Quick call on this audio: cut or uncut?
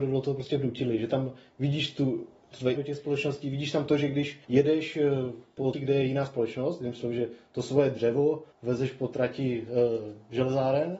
cut